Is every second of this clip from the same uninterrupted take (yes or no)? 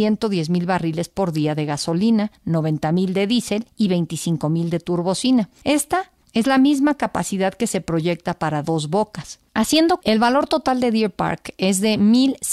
no